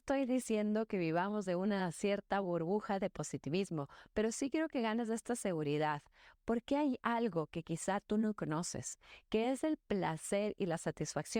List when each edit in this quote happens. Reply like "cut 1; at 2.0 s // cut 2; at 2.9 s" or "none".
none